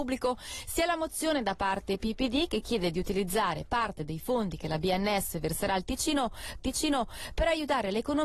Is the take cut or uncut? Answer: cut